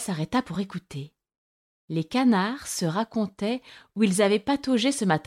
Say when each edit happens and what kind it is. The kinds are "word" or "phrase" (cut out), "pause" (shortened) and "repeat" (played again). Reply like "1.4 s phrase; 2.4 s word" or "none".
none